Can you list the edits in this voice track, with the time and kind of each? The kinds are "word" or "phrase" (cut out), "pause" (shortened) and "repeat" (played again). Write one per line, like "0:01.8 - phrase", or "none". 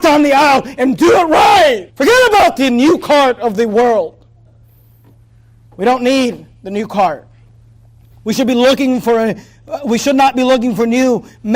0:01.9 - pause